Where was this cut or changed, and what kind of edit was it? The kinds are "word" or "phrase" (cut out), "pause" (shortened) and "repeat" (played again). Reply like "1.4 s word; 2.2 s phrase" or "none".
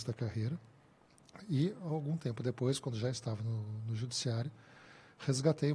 none